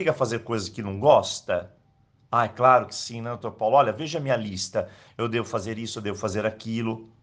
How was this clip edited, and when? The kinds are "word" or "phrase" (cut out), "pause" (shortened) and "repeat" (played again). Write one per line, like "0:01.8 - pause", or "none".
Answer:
none